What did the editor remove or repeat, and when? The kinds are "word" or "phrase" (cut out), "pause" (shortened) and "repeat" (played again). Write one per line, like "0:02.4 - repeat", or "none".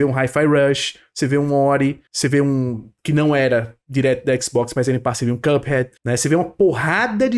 0:02.1 - pause
0:03.0 - pause
0:06.0 - pause

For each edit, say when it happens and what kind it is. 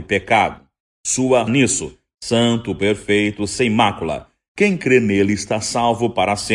0:01.5 - phrase

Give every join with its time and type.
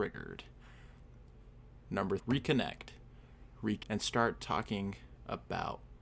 0:02.2 - word
0:03.8 - word

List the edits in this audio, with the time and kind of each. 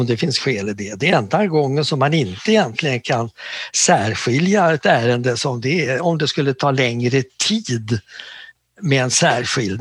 none

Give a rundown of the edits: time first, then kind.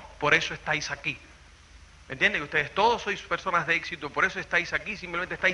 none

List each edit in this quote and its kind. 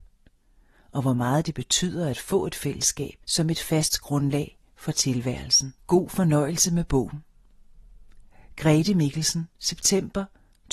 0:03.2 - pause
0:05.8 - pause
0:09.5 - pause

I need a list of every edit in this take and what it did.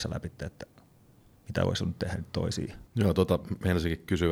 0:02.9 - pause

